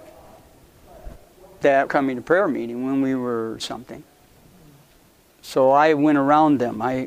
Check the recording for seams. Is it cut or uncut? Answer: cut